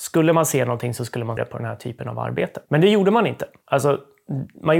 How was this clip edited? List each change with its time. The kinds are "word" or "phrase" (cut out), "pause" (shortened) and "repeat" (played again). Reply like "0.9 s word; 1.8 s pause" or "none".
1.4 s word

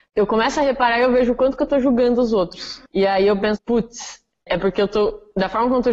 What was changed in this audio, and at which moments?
2.9 s pause; 3.6 s word; 4.5 s word

